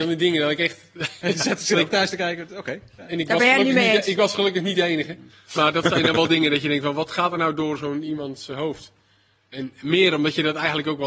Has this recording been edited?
no; 0 cuts

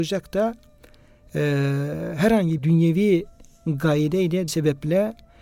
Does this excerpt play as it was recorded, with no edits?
no; 2 cuts; at 2.6 s, 4.5 s

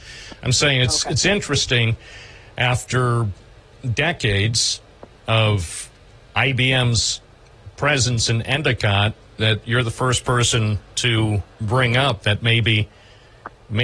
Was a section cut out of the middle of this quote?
no; 0 cuts

